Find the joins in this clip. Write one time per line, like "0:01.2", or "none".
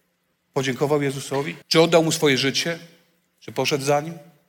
0:01.6